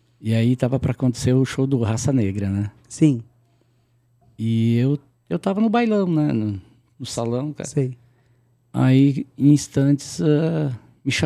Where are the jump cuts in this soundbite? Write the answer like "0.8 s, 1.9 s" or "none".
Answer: none